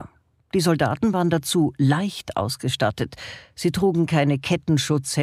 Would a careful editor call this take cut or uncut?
uncut